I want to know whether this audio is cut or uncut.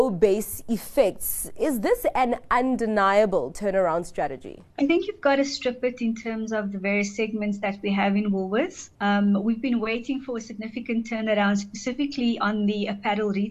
cut